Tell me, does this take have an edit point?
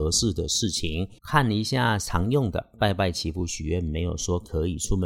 yes; 1 cut; at 1.2 s

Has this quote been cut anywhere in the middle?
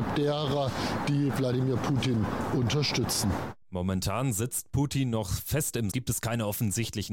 yes; 2 cuts; at 3.6 s, 5.9 s

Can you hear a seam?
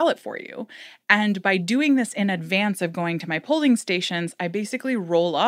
no; 0 cuts

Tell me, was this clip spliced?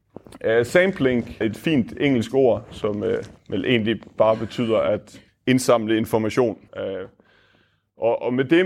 yes; 4 cuts; at 1.4 s, 3.4 s, 5.3 s, 6.7 s

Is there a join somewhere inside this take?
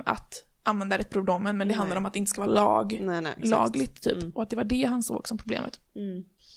no; 0 cuts

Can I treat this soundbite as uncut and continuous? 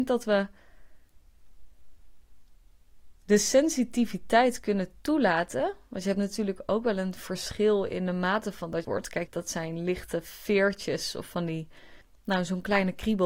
no; 4 cuts; at 3.2 s, 8.8 s, 9.3 s, 12.0 s

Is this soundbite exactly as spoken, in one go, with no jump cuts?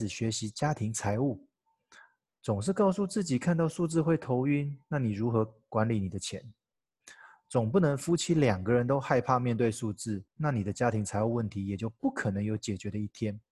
no; 1 cut; at 10.3 s

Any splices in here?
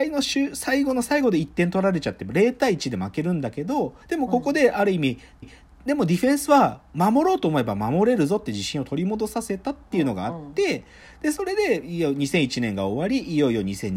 yes; 2 cuts; at 4.0 s, 5.4 s

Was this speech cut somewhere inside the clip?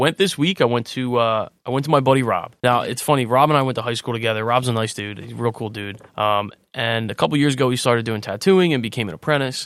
yes; 2 cuts; at 2.6 s, 6.1 s

